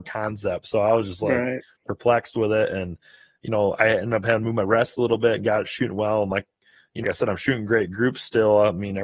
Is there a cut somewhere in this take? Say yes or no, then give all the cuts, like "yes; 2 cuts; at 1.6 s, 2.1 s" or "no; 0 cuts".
yes; 1 cut; at 7.0 s